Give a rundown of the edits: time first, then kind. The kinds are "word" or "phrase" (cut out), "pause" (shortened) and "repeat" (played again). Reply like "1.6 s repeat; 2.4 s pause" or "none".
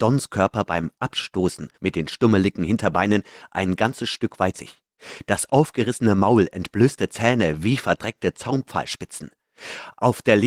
1.7 s pause; 4.5 s word